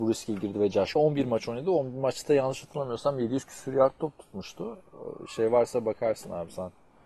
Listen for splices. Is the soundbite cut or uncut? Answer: cut